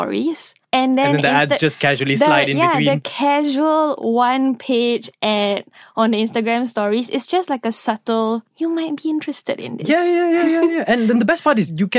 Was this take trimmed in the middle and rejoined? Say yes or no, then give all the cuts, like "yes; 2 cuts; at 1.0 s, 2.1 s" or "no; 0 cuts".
no; 0 cuts